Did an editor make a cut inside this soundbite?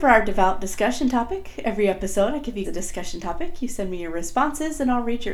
yes; 1 cut; at 2.6 s

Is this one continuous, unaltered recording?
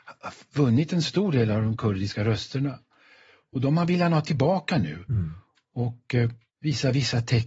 yes; 0 cuts

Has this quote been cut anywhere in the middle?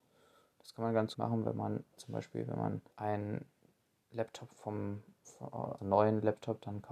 yes; 4 cuts; at 1.1 s, 2.0 s, 2.9 s, 5.8 s

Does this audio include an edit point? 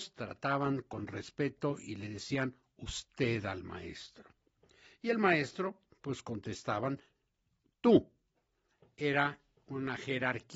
no; 0 cuts

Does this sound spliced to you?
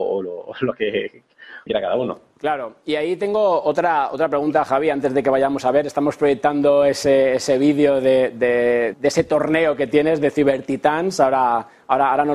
yes; 2 cuts; at 1.7 s, 8.9 s

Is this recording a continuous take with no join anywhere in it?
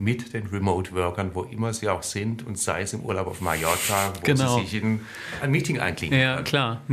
yes; 0 cuts

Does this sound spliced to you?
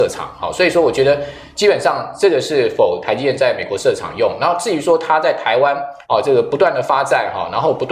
yes; 1 cut; at 6.0 s

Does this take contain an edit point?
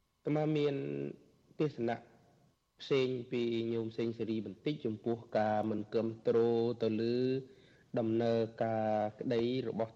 no; 0 cuts

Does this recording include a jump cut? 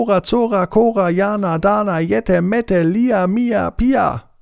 no; 0 cuts

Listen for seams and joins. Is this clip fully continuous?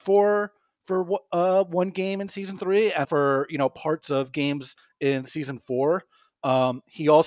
no; 1 cut; at 3.0 s

